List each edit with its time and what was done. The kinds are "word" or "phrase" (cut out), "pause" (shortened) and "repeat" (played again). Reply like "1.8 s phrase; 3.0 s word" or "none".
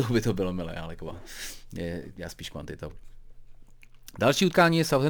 none